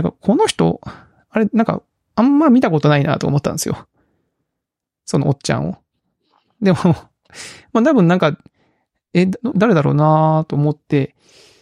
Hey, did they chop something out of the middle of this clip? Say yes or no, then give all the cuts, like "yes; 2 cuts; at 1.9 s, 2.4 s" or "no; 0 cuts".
yes; 1 cut; at 9.5 s